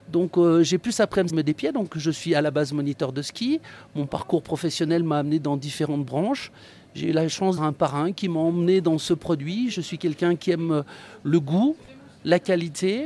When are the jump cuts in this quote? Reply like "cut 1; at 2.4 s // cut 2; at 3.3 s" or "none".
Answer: cut 1; at 1.3 s // cut 2; at 7.6 s

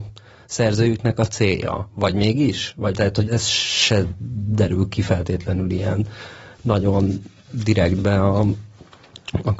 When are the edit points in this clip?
cut 1; at 2.9 s // cut 2; at 3.3 s

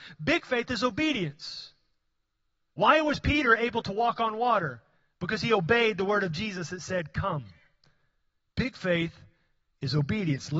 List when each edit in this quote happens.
none

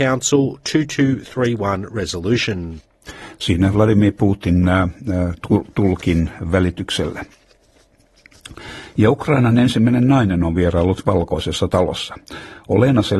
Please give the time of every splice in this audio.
none

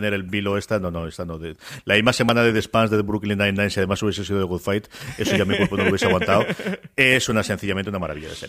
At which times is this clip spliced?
none

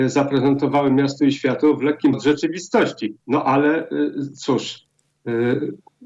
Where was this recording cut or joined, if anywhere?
cut 1; at 2.1 s // cut 2; at 3.2 s

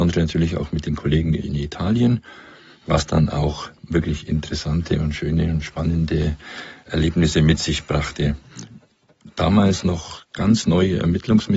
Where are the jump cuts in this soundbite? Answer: none

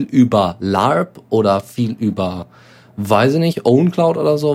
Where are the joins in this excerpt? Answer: none

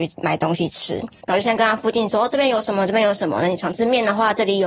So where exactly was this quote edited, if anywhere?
none

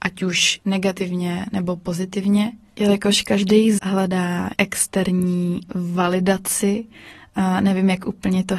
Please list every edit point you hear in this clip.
cut 1; at 3.8 s // cut 2; at 4.5 s

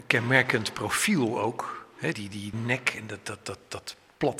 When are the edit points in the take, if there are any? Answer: cut 1; at 2.1 s // cut 2; at 2.5 s

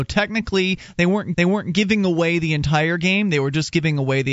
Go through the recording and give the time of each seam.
cut 1; at 1.3 s

